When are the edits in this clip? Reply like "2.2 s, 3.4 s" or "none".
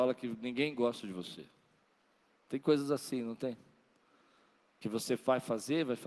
none